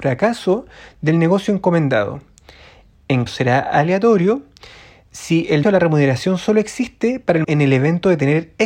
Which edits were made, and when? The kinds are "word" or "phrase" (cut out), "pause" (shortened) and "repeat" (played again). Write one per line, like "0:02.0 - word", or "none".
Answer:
0:03.3 - word
0:05.6 - word
0:07.4 - word